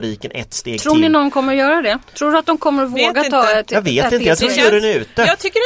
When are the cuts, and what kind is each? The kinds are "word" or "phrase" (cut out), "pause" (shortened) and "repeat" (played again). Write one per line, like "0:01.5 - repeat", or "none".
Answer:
none